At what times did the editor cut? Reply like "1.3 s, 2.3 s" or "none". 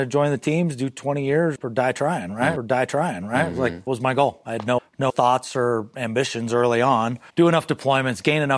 1.6 s, 2.6 s, 3.9 s, 4.8 s, 5.1 s, 7.3 s